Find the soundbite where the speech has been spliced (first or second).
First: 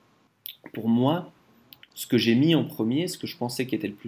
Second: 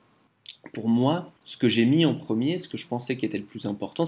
second